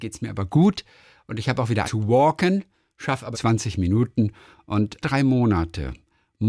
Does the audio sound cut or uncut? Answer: cut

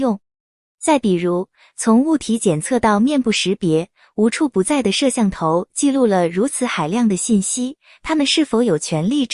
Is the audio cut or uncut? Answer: uncut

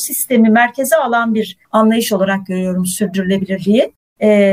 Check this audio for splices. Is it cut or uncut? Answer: cut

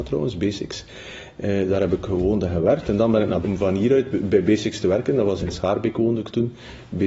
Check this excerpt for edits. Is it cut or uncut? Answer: cut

